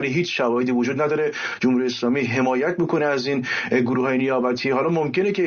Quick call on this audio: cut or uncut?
uncut